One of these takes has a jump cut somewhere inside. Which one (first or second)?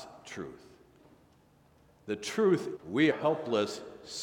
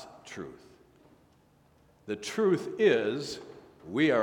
first